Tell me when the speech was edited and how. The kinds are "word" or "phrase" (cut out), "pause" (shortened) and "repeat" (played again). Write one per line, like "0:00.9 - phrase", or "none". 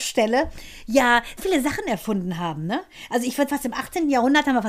0:01.4 - word
0:03.5 - word